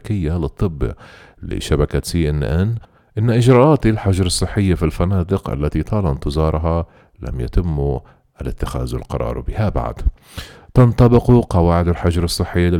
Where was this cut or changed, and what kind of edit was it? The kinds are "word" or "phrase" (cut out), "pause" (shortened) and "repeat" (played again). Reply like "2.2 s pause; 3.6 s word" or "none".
none